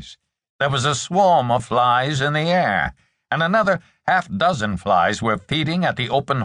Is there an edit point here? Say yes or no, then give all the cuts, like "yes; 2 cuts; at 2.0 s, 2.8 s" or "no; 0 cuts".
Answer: no; 0 cuts